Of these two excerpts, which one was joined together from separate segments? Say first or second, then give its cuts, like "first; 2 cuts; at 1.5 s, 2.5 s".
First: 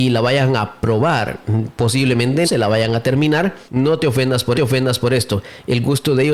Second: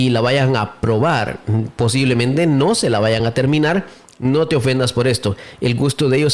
first; 3 cuts; at 2.4 s, 3.7 s, 4.5 s